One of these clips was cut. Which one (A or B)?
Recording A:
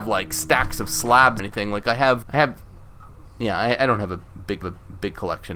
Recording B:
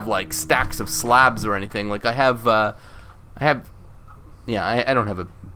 A